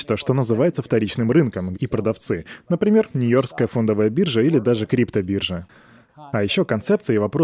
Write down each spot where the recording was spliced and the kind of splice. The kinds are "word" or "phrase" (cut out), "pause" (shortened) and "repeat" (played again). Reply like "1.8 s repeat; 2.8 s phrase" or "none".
1.7 s phrase; 4.9 s word